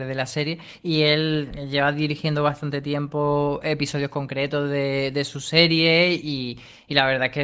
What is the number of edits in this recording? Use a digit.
0